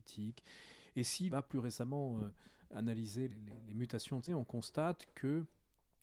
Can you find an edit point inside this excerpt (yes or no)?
yes